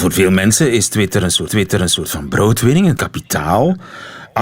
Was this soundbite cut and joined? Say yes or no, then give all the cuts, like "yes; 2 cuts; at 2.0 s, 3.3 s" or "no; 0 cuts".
yes; 2 cuts; at 1.5 s, 3.0 s